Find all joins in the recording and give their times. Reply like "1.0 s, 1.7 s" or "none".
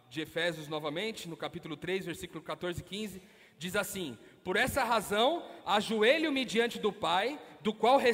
none